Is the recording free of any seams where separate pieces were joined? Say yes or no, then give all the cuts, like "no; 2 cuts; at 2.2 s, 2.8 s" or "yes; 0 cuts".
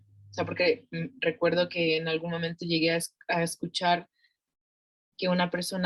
yes; 0 cuts